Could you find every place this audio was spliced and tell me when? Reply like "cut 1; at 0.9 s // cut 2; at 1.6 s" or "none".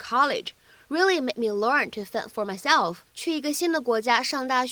cut 1; at 3.1 s